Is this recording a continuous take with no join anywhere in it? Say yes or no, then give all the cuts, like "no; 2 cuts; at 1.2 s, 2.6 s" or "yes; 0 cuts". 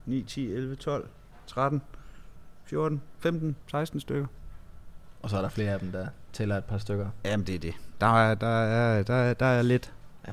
yes; 0 cuts